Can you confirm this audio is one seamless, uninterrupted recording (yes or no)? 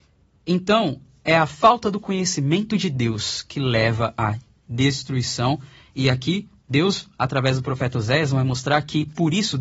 yes